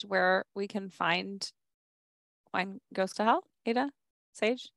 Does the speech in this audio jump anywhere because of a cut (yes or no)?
yes